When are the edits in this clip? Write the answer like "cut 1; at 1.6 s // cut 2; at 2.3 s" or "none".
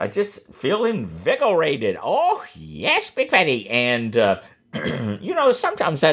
cut 1; at 4.5 s